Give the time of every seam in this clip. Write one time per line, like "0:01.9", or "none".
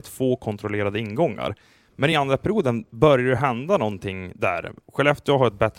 none

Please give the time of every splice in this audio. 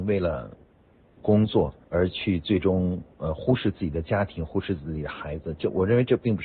0:01.8

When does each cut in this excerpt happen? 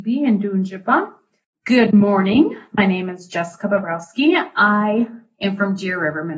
none

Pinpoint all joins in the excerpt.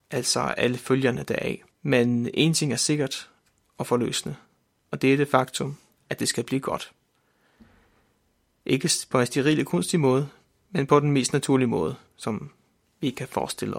0:01.7

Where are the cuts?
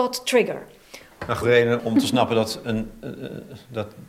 0:01.4
0:01.8

